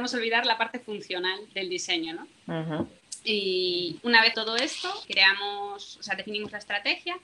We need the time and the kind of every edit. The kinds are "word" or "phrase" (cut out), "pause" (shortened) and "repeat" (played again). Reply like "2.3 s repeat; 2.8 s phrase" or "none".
1.5 s word; 4.0 s word; 4.3 s word; 5.0 s word